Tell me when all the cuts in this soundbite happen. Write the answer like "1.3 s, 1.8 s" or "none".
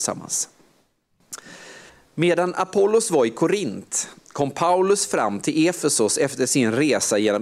1.9 s